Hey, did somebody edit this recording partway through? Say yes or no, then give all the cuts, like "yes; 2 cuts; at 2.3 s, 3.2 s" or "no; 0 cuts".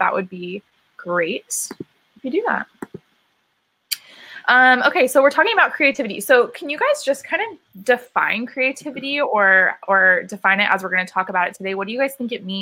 no; 0 cuts